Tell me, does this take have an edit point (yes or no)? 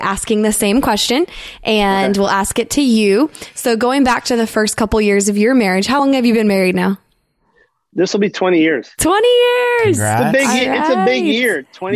no